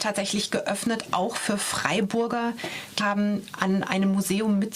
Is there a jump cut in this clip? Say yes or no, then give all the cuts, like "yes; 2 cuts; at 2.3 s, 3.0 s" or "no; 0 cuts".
yes; 1 cut; at 3.0 s